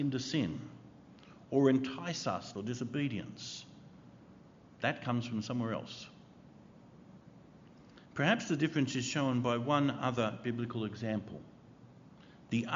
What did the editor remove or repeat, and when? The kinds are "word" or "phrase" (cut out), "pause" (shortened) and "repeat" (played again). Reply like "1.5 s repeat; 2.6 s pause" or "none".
2.5 s phrase; 8.1 s pause